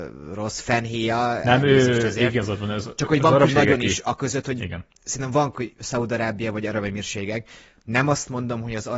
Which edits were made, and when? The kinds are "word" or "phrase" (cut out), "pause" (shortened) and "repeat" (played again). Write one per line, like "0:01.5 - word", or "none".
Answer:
0:03.5 - word
0:04.9 - pause
0:05.5 - word